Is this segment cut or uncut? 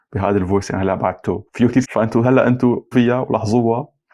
cut